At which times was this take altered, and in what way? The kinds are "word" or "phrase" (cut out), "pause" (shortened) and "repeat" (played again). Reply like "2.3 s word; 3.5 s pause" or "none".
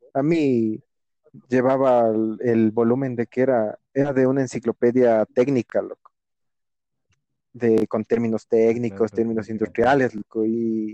3.8 s pause